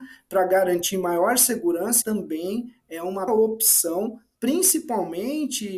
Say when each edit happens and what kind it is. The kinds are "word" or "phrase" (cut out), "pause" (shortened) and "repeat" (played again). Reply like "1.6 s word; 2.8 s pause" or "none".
2.0 s phrase; 3.3 s word